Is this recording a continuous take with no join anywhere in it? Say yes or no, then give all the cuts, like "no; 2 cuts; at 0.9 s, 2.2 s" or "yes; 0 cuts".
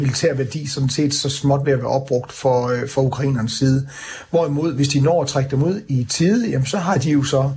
yes; 0 cuts